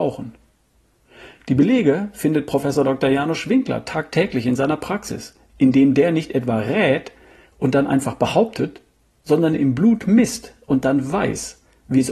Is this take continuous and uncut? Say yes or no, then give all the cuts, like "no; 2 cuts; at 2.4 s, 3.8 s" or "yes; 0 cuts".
yes; 0 cuts